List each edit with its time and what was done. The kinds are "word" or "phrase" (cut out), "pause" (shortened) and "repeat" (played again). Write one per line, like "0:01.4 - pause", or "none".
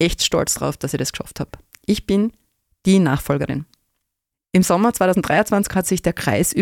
none